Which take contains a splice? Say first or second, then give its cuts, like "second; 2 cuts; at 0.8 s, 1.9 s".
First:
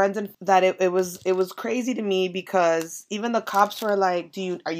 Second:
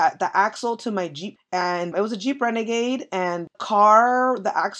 second; 3 cuts; at 1.4 s, 1.9 s, 3.5 s